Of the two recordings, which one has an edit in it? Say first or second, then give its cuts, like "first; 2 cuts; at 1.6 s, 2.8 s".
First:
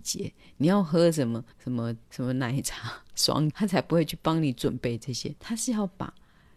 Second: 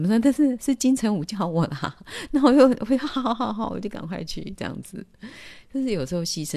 first; 4 cuts; at 1.5 s, 2.0 s, 3.5 s, 5.4 s